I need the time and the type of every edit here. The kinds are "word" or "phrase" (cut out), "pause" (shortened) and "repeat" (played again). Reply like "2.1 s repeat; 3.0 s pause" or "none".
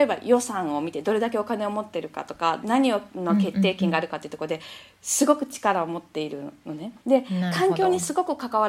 7.0 s pause